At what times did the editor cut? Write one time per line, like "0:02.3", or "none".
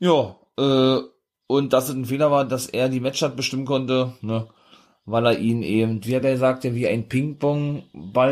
none